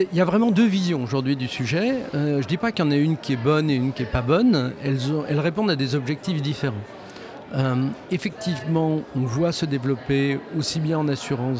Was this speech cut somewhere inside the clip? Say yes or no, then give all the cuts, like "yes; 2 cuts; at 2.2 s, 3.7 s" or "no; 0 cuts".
no; 0 cuts